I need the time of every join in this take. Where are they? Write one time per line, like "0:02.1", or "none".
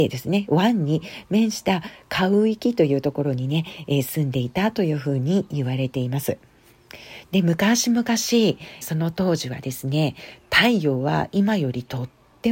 0:08.8